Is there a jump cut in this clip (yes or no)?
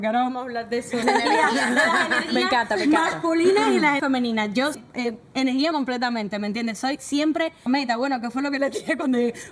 yes